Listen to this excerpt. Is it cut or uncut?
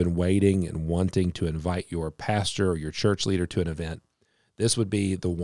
uncut